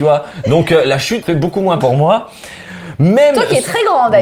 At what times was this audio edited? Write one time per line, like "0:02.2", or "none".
0:01.2
0:01.8